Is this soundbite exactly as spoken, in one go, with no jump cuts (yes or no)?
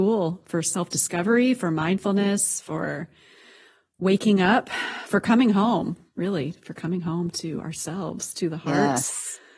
yes